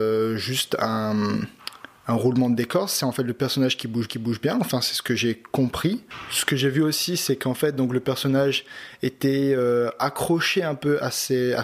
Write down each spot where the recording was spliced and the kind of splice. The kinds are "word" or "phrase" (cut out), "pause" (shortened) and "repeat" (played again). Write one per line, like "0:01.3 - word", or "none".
0:04.1 - repeat